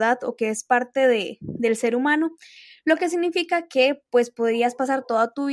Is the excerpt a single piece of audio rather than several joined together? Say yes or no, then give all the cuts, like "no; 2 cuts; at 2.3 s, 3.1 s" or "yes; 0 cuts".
yes; 0 cuts